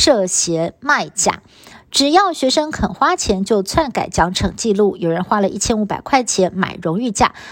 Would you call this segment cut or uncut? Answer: uncut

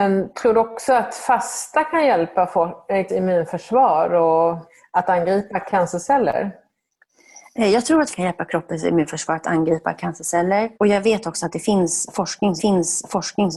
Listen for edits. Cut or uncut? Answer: cut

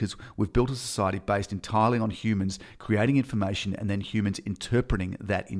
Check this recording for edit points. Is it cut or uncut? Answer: uncut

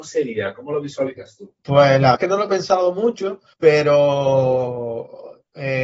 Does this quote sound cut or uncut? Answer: cut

